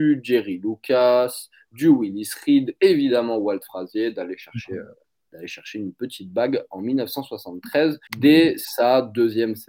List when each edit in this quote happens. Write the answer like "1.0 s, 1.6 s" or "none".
8.1 s